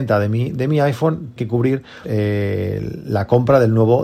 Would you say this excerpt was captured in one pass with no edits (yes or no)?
no